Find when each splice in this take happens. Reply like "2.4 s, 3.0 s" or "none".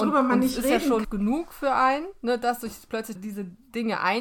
1.0 s, 3.1 s